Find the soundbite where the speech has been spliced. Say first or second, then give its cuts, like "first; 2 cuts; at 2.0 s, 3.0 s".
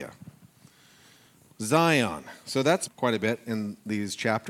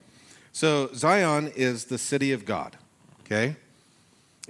first; 1 cut; at 2.9 s